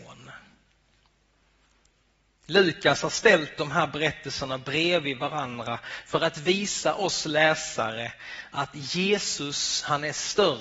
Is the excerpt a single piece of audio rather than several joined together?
yes; 0 cuts

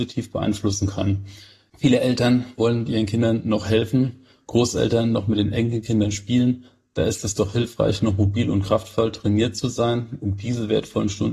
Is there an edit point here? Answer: no; 0 cuts

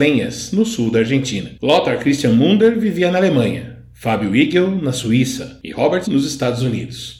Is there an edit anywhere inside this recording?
yes; 1 cut; at 6.0 s

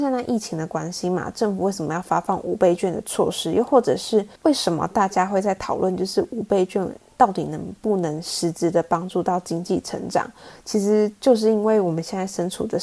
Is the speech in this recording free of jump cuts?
no; 1 cut; at 4.4 s

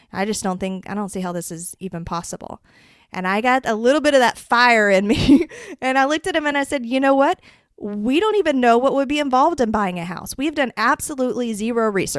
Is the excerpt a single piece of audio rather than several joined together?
yes; 0 cuts

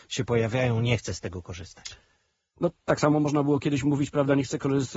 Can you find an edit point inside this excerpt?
no; 0 cuts

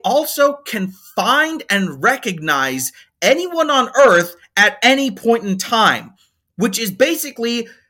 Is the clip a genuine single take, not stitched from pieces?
yes; 0 cuts

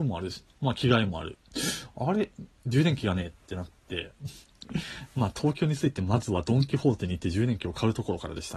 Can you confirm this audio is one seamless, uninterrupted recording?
yes; 0 cuts

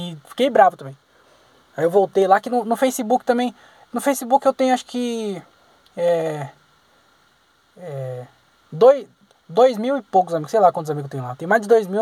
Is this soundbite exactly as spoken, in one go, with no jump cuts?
yes; 0 cuts

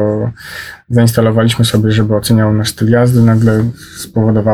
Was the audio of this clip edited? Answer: no; 0 cuts

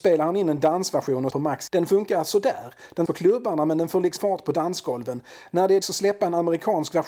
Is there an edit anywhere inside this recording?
yes; 5 cuts; at 1.3 s, 1.7 s, 3.1 s, 4.2 s, 5.8 s

